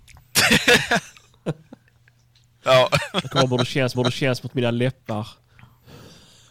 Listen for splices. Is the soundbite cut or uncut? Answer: cut